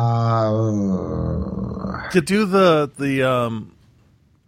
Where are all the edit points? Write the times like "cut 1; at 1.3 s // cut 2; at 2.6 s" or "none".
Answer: cut 1; at 2.2 s // cut 2; at 2.9 s